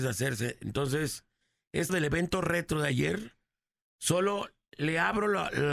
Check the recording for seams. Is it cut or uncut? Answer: cut